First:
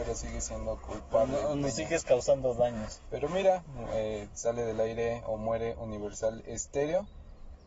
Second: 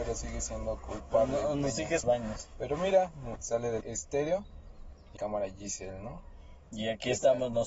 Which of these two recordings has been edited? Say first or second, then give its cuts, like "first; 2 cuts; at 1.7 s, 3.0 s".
second; 4 cuts; at 2.0 s, 3.4 s, 3.8 s, 5.2 s